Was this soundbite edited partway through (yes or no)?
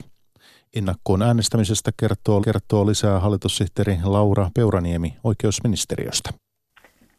yes